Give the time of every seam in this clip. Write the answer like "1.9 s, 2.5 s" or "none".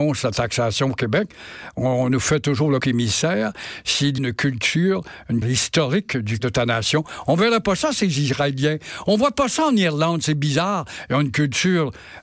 2.8 s, 4.2 s, 5.4 s, 6.4 s